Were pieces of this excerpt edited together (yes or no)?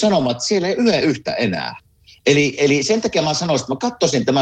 no